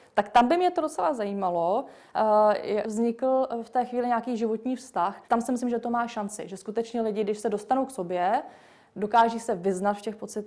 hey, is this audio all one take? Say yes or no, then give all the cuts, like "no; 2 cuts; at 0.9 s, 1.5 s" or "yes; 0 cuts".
no; 2 cuts; at 2.8 s, 5.2 s